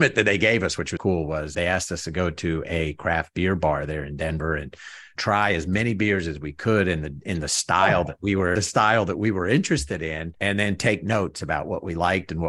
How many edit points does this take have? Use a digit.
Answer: 5